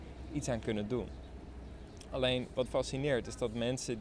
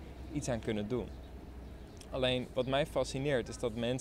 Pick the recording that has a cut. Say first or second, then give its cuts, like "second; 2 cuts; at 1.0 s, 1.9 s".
first; 1 cut; at 2.7 s